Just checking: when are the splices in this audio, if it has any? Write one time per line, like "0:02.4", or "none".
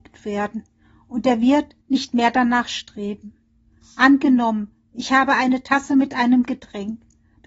0:01.8